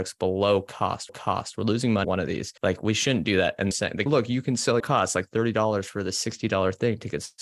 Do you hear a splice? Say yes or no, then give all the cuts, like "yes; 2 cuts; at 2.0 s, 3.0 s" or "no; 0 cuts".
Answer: yes; 6 cuts; at 1.1 s, 2.0 s, 2.6 s, 3.7 s, 4.1 s, 4.8 s